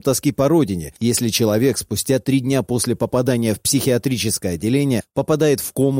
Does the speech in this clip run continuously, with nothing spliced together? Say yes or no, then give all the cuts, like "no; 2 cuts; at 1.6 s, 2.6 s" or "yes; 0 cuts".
yes; 0 cuts